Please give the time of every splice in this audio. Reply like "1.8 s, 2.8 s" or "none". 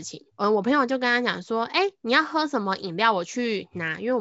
none